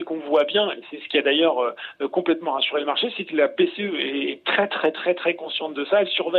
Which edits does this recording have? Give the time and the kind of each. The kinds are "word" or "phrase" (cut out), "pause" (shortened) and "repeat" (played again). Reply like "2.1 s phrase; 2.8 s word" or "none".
none